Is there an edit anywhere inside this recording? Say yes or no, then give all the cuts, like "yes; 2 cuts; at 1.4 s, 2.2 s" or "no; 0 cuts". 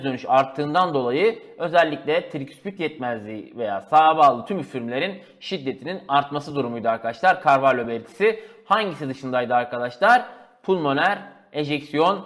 no; 0 cuts